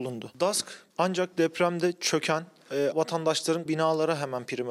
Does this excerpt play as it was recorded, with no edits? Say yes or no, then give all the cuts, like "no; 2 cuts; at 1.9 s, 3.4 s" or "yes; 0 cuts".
no; 3 cuts; at 0.9 s, 2.9 s, 3.7 s